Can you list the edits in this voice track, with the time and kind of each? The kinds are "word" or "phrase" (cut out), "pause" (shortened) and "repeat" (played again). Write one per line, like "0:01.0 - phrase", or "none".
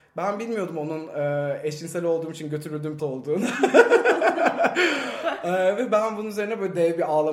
0:03.0 - word